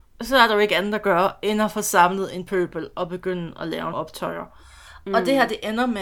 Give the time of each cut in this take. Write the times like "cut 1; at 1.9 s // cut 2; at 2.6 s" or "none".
cut 1; at 3.9 s